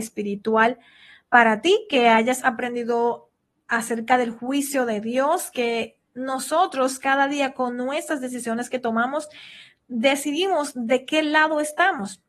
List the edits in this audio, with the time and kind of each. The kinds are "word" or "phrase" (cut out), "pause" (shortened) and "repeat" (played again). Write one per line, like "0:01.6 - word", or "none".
none